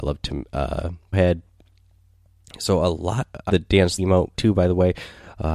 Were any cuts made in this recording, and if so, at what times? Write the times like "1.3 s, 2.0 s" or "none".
1.1 s, 3.5 s, 4.0 s, 4.3 s